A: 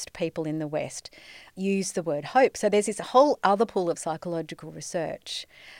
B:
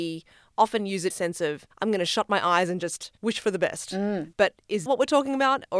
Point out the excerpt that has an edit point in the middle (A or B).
B